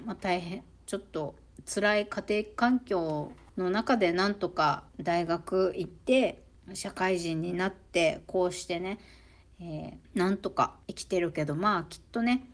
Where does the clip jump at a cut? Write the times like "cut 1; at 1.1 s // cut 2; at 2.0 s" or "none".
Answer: cut 1; at 3.5 s // cut 2; at 4.9 s // cut 3; at 6.5 s // cut 4; at 10.0 s // cut 5; at 10.8 s